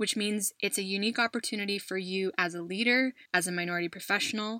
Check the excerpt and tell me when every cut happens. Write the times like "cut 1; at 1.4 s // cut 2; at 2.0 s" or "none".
cut 1; at 3.3 s